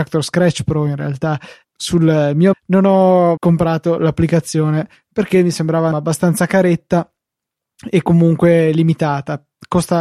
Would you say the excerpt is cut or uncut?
cut